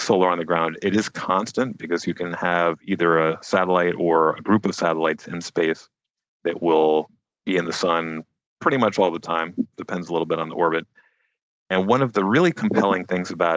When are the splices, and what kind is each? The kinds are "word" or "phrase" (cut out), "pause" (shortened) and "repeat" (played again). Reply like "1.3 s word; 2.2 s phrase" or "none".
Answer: none